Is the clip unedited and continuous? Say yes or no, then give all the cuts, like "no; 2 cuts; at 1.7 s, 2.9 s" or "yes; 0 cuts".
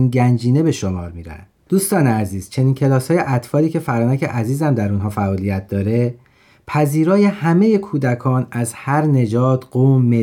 yes; 0 cuts